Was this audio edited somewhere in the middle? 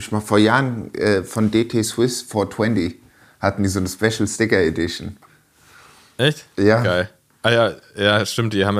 no; 0 cuts

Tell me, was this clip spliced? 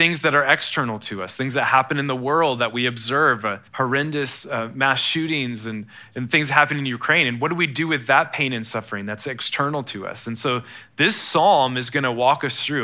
yes; 1 cut; at 3.7 s

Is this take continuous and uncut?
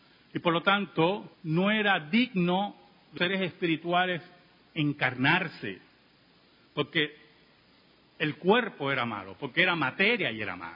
no; 2 cuts; at 1.3 s, 3.2 s

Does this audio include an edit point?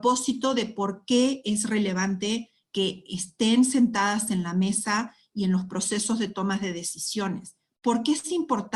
no; 0 cuts

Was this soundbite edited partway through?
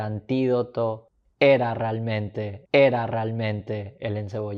yes; 1 cut; at 2.7 s

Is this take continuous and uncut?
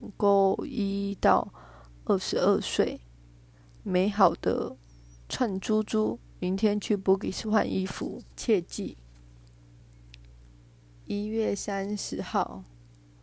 no; 1 cut; at 8.3 s

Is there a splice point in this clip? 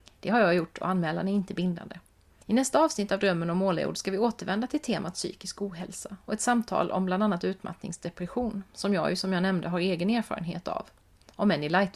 yes; 1 cut; at 2.3 s

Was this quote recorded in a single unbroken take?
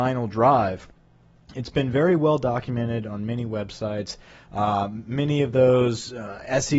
yes; 0 cuts

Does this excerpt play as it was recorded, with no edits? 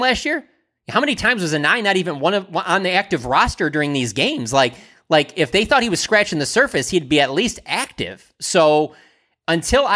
yes; 0 cuts

